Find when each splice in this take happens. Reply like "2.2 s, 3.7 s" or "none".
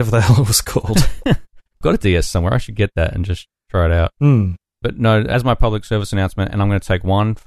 1.8 s